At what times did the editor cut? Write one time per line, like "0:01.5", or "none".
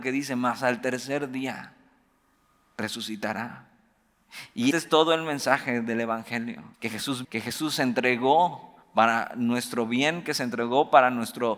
0:04.7
0:06.7
0:07.2
0:08.8